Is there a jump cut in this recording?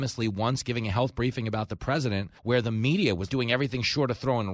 yes; 2 cuts; at 2.4 s, 3.3 s

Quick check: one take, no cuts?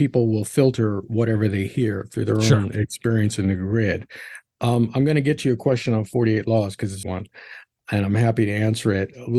no; 1 cut; at 7.0 s

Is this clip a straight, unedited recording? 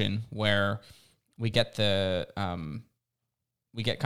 yes; 0 cuts

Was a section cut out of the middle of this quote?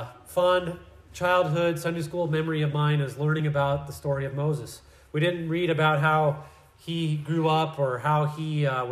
no; 0 cuts

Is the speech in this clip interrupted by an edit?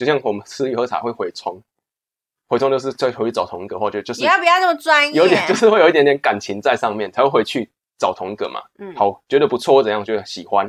no; 0 cuts

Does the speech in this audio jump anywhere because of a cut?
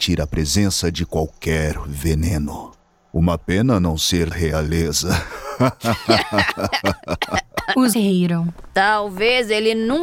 yes; 2 cuts; at 4.3 s, 7.9 s

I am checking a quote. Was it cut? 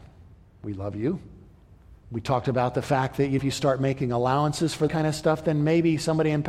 yes; 3 cuts; at 2.0 s, 3.4 s, 4.9 s

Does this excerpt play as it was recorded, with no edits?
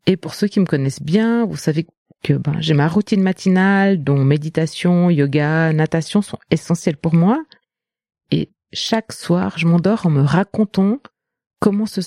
yes; 0 cuts

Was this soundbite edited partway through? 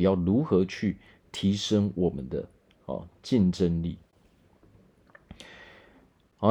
no; 0 cuts

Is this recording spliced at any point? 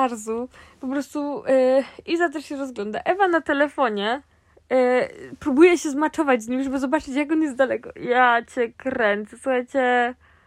no; 0 cuts

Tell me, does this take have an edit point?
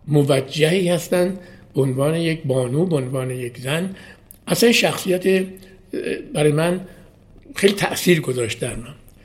no; 0 cuts

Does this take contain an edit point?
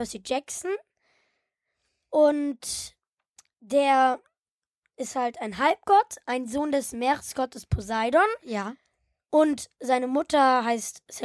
no; 0 cuts

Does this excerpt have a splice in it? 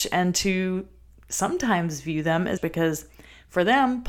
yes; 1 cut; at 2.6 s

